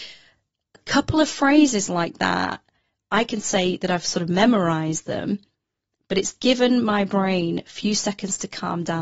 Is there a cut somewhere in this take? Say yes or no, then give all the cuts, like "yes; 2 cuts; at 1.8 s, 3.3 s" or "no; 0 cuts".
no; 0 cuts